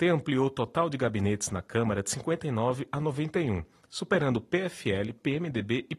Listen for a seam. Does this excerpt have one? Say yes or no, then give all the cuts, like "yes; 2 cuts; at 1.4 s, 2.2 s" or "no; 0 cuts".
no; 0 cuts